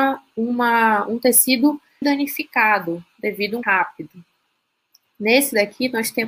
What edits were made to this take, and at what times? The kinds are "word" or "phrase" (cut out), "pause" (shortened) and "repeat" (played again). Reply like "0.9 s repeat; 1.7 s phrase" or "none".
2.0 s phrase; 3.6 s phrase